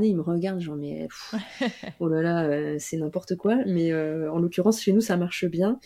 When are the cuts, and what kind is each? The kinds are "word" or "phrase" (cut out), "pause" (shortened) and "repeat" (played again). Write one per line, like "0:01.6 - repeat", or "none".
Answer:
none